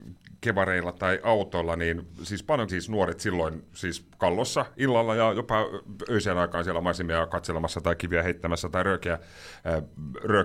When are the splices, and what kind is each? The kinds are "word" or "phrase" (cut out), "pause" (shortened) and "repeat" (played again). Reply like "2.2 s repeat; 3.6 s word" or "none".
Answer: 2.7 s word